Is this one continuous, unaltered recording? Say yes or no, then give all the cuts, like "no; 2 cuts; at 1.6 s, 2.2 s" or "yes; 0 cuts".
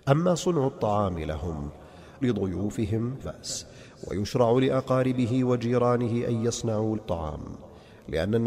no; 3 cuts; at 2.2 s, 3.2 s, 6.9 s